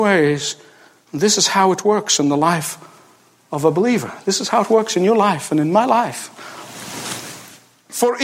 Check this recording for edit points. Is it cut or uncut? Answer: uncut